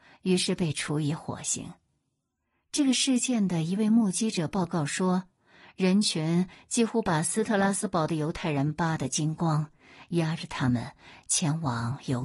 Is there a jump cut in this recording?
no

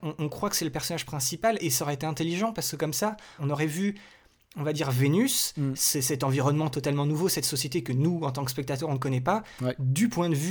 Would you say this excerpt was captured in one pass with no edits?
yes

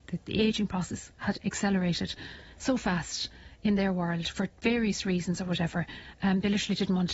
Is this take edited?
no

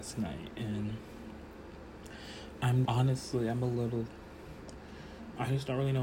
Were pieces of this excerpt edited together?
yes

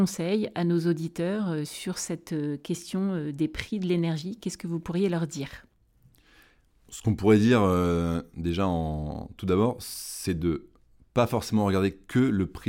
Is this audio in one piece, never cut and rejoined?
yes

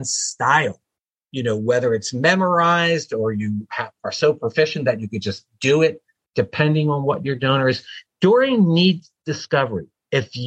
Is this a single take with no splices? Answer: yes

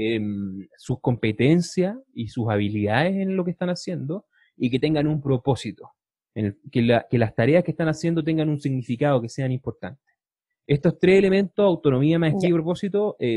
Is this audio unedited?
yes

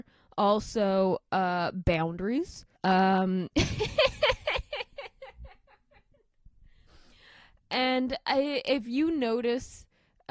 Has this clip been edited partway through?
yes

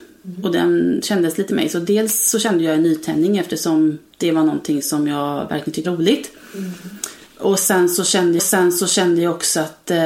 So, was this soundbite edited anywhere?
yes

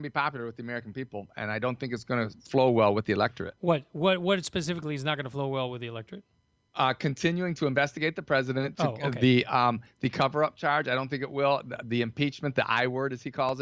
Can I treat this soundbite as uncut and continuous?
yes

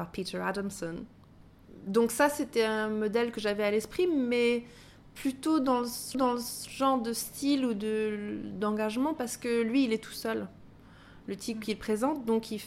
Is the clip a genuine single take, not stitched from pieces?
no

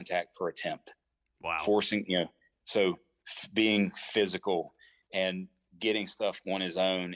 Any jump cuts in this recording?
no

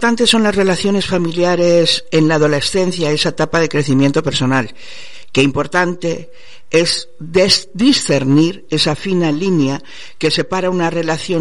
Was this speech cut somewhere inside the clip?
no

